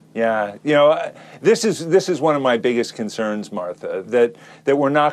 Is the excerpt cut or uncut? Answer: cut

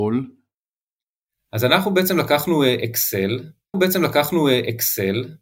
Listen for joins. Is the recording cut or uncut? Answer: cut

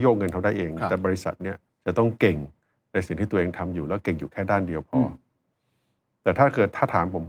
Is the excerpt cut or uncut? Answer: cut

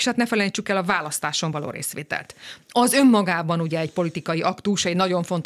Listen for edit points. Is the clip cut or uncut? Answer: uncut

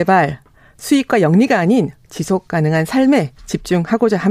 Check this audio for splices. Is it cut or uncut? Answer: uncut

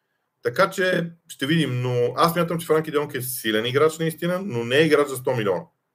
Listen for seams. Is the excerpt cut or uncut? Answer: uncut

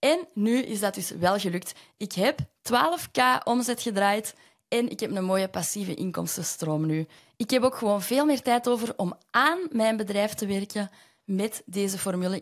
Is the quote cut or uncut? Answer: uncut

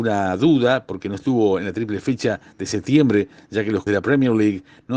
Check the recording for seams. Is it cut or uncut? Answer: cut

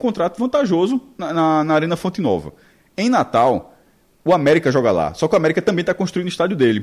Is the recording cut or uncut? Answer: uncut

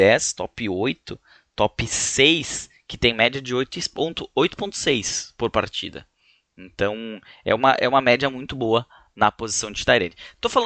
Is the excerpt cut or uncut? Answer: uncut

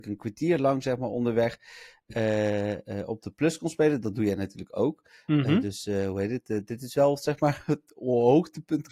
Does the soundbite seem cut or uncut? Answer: uncut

